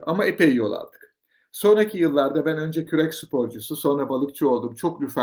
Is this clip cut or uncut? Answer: uncut